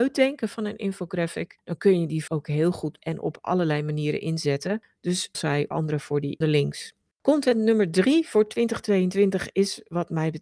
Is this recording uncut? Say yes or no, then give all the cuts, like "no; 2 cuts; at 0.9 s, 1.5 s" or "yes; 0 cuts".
no; 6 cuts; at 2.3 s, 3.0 s, 5.3 s, 5.7 s, 6.4 s, 7.1 s